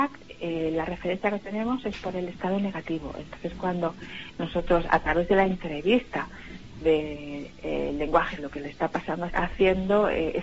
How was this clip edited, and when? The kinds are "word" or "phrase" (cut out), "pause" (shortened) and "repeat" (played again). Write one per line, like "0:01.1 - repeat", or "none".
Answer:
0:06.8 - word
0:08.4 - phrase
0:09.3 - phrase